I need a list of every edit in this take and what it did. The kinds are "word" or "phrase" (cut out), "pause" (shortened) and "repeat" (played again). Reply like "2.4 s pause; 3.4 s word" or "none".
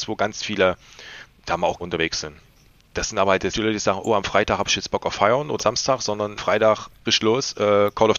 1.8 s word; 3.5 s word; 5.6 s word; 6.4 s word; 7.1 s word